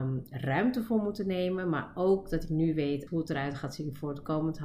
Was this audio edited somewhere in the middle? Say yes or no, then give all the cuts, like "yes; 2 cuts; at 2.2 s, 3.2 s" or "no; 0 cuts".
yes; 1 cut; at 3.1 s